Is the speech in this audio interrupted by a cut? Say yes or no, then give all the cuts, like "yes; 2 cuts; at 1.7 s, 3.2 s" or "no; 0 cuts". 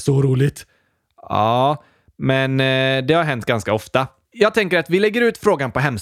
no; 0 cuts